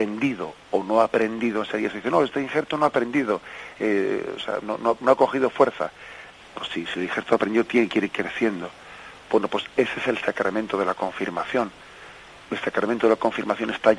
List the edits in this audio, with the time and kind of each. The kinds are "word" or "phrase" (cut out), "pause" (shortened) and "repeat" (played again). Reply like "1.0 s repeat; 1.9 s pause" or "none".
none